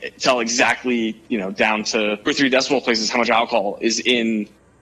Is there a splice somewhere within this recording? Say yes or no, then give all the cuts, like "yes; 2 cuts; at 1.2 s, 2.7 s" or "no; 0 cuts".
yes; 1 cut; at 2.3 s